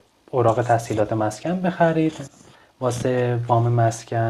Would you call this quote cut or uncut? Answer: uncut